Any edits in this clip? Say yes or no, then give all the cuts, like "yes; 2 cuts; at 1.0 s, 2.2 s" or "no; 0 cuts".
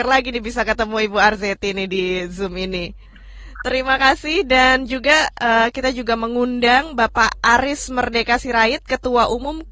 no; 0 cuts